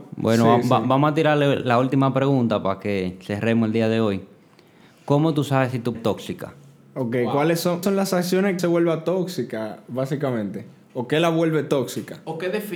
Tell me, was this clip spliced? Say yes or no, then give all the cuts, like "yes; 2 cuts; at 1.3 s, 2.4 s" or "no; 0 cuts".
yes; 3 cuts; at 5.9 s, 7.8 s, 8.6 s